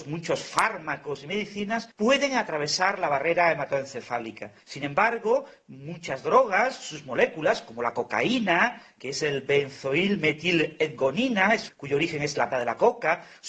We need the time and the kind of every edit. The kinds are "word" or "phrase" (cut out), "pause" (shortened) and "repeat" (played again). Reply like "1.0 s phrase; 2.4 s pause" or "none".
1.9 s pause; 4.6 s pause; 11.7 s phrase; 12.5 s word